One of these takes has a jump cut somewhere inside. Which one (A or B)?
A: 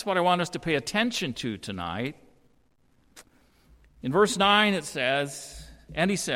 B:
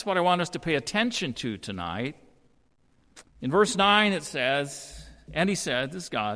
B